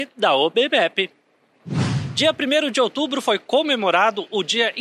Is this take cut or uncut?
uncut